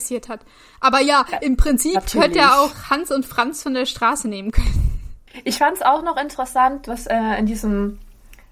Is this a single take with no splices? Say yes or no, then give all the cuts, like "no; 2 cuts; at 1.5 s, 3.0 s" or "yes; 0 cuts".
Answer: yes; 0 cuts